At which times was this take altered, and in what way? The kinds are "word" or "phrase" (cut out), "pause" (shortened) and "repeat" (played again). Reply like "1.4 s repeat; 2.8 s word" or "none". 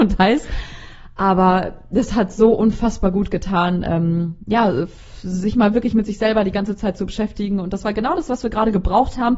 none